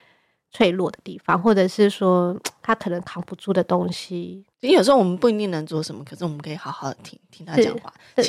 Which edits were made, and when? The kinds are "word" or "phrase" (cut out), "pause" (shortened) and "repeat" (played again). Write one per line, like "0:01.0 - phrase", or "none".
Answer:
0:04.5 - pause